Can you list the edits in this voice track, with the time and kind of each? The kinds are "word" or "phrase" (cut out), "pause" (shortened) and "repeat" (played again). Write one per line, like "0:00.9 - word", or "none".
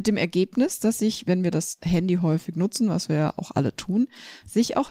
none